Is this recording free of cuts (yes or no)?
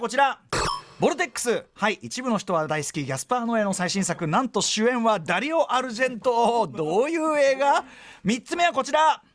yes